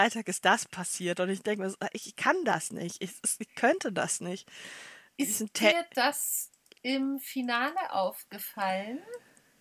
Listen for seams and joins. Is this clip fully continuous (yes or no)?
yes